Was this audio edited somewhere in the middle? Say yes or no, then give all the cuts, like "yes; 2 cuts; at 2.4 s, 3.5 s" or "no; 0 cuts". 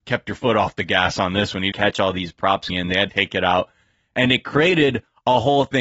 yes; 3 cuts; at 1.7 s, 2.7 s, 3.1 s